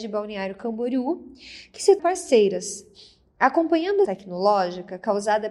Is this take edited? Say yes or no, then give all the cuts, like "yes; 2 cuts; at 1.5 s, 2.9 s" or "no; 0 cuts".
yes; 2 cuts; at 2.0 s, 4.1 s